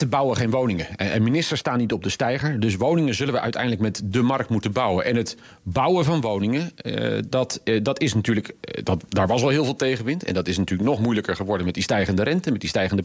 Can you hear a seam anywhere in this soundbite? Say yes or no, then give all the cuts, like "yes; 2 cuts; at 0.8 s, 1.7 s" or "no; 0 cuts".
no; 0 cuts